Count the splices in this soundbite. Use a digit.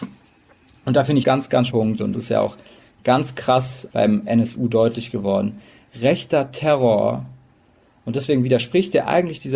4